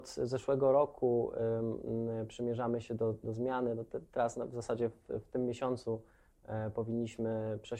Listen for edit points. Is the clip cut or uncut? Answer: uncut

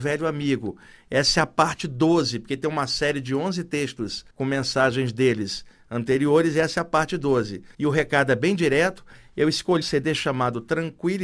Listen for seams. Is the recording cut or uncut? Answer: cut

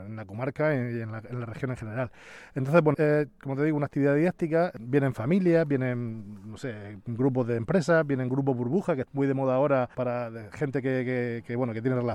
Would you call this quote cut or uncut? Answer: cut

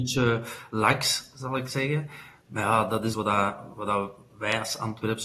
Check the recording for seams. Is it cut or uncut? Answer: cut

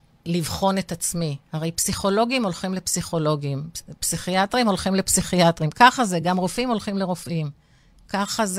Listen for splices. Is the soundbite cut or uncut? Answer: uncut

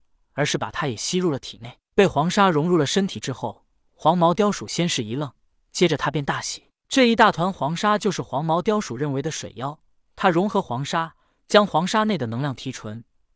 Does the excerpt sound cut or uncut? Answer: uncut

